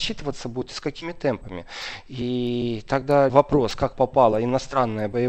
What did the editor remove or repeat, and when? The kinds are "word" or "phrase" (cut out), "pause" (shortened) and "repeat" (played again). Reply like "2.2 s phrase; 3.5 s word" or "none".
3.3 s word